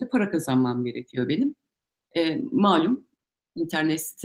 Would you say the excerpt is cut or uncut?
uncut